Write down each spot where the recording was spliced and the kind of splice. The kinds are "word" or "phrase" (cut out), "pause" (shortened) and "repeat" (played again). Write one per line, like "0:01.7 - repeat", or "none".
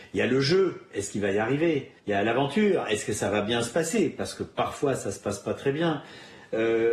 0:02.0 - pause